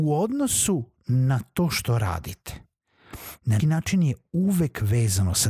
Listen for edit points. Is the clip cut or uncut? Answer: cut